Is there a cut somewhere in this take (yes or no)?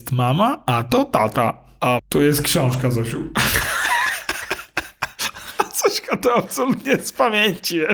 yes